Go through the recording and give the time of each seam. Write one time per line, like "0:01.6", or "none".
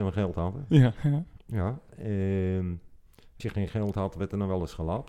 0:03.4